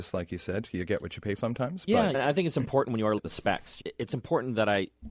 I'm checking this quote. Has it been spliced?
yes; 4 cuts; at 1.4 s, 2.1 s, 3.2 s, 3.8 s

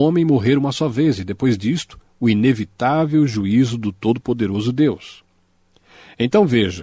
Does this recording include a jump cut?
no; 0 cuts

